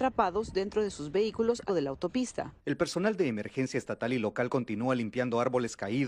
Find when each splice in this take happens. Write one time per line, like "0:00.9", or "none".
0:01.7
0:02.6